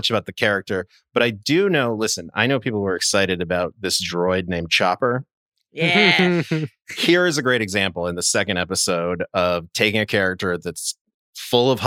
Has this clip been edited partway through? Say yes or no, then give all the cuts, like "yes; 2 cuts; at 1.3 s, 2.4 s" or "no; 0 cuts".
no; 0 cuts